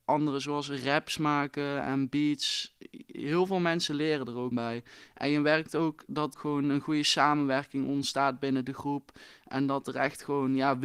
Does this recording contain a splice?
yes; 2 cuts; at 4.5 s, 6.3 s

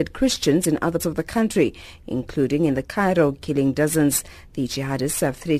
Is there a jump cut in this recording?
yes; 2 cuts; at 1.0 s, 2.8 s

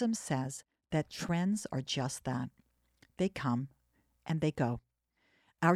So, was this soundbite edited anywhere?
no; 0 cuts

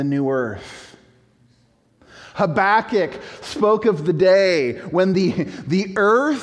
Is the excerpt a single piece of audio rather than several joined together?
yes; 0 cuts

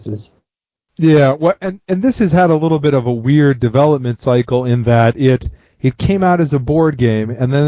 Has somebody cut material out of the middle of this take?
no; 0 cuts

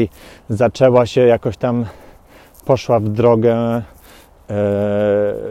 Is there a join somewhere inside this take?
no; 0 cuts

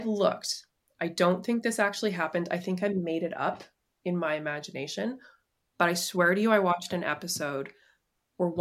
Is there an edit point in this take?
no; 0 cuts

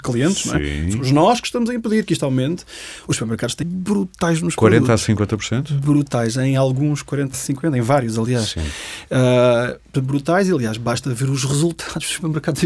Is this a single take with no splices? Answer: no; 2 cuts; at 3.6 s, 7.3 s

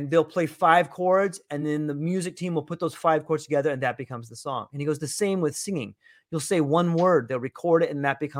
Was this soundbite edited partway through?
no; 0 cuts

